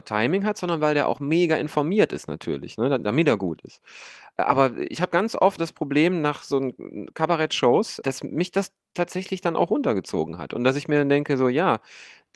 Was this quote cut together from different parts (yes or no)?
yes